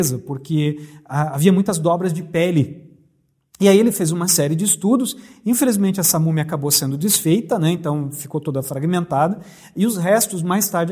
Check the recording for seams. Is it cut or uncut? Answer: uncut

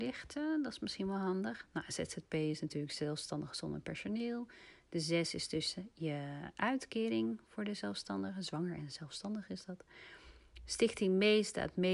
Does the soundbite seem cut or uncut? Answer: uncut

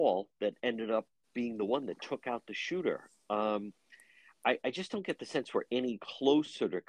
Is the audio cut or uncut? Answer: uncut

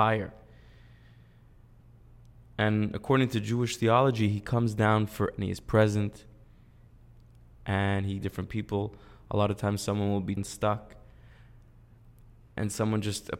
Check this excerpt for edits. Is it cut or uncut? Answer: cut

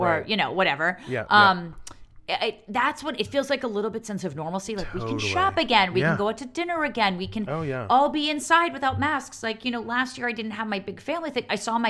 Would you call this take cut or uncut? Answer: uncut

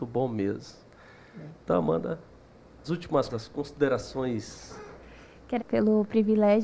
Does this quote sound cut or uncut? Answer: cut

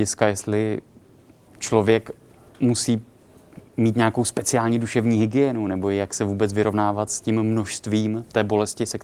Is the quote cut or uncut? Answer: uncut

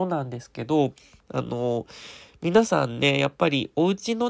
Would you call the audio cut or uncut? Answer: uncut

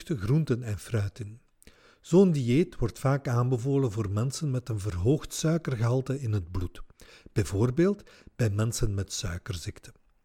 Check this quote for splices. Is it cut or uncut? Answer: uncut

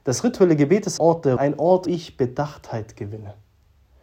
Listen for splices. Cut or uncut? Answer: cut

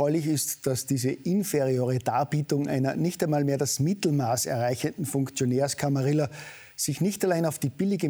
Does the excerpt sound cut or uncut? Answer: uncut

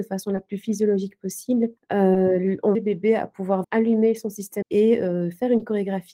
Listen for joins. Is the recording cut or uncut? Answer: cut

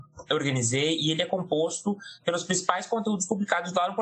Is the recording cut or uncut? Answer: uncut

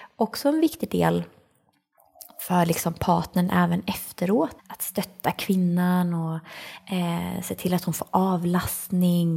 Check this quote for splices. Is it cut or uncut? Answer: cut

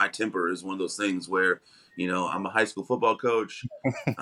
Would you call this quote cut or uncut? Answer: uncut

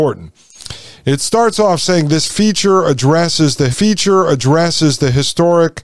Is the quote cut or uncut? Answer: cut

